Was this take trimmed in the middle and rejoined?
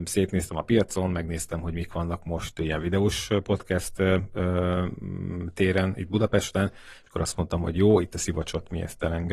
no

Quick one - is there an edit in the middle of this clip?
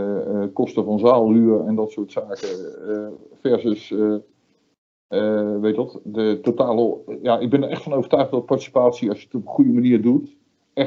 no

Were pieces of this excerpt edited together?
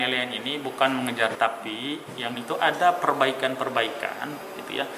yes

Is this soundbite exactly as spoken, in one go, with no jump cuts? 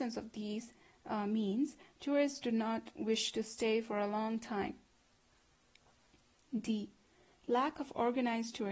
yes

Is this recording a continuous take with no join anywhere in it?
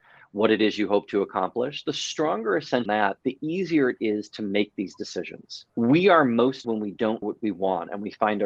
no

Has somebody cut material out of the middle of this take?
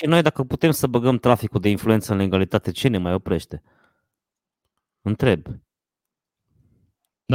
no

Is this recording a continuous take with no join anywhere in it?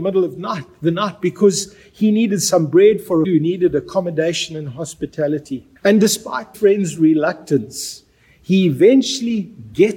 no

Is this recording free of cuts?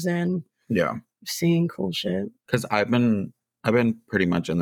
yes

